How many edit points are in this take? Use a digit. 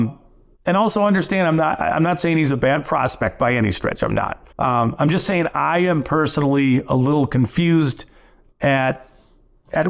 1